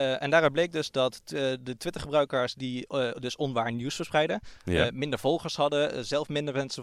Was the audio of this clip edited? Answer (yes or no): no